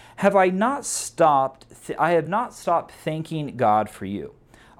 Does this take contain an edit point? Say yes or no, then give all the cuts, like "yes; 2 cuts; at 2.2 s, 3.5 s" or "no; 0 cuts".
no; 0 cuts